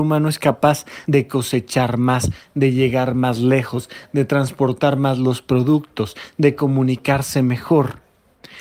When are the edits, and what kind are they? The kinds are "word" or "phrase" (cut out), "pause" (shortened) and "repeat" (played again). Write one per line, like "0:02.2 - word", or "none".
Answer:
0:01.0 - phrase